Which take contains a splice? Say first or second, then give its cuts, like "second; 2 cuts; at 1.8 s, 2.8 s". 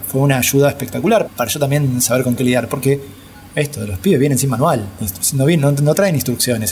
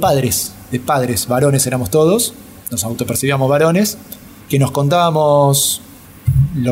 first; 1 cut; at 1.3 s